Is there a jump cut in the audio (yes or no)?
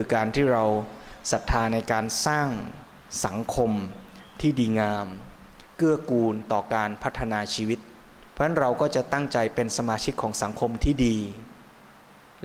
yes